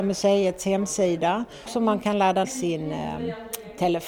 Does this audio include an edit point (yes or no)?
yes